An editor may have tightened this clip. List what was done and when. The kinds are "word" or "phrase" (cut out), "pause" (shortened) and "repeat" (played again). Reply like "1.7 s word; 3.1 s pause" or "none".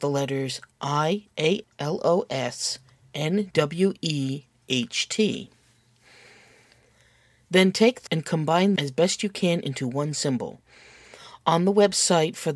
1.6 s word; 3.5 s word; 8.1 s word; 8.8 s word